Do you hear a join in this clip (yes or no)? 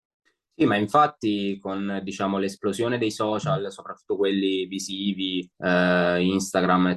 yes